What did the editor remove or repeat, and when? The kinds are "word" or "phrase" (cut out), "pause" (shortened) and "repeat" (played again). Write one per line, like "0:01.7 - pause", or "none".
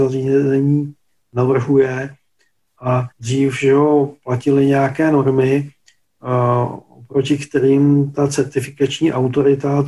0:03.1 - pause